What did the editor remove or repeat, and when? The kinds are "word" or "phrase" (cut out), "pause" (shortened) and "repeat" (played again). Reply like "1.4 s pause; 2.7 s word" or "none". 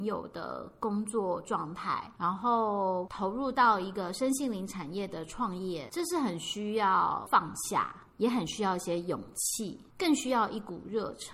8.1 s pause; 9.9 s pause